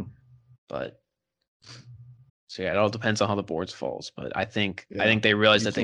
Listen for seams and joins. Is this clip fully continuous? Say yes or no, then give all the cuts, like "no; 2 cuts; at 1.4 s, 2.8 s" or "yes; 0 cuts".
no; 1 cut; at 2.3 s